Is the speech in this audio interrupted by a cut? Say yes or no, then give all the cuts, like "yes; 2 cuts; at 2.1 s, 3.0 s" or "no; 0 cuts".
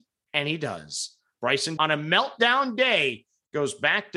yes; 1 cut; at 1.8 s